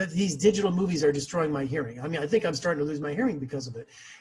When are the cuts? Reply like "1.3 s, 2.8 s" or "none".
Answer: none